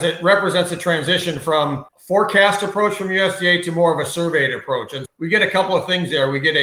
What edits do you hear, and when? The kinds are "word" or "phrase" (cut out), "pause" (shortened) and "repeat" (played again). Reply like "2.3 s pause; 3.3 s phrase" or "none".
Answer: 1.9 s pause; 5.0 s word